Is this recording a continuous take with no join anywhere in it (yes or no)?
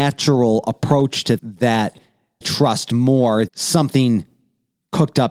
no